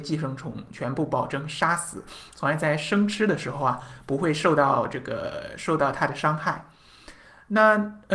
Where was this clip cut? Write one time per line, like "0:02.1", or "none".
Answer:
none